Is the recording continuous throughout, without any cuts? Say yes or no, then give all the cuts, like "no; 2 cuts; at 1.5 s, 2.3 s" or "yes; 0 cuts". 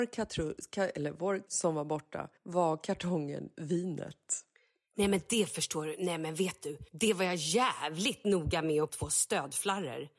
no; 6 cuts; at 1.5 s, 2.4 s, 3.5 s, 4.5 s, 6.9 s, 8.9 s